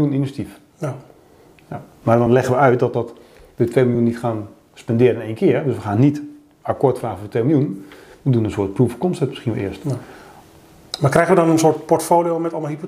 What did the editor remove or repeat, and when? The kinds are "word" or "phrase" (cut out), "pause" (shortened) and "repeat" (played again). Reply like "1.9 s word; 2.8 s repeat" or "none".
none